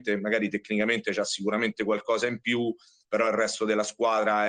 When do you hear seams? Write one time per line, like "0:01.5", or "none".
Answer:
none